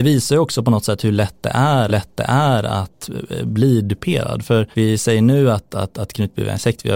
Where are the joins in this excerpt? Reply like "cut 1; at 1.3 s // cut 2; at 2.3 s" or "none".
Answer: cut 1; at 1.9 s // cut 2; at 4.7 s